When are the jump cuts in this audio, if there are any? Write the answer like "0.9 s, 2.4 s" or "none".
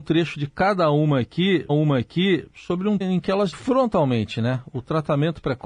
1.7 s, 3.0 s, 3.5 s